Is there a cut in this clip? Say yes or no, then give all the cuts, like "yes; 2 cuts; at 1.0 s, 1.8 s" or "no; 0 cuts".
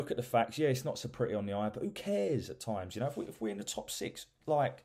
no; 0 cuts